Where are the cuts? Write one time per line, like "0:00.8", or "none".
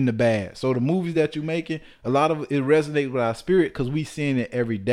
none